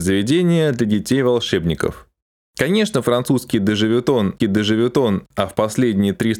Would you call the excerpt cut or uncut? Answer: cut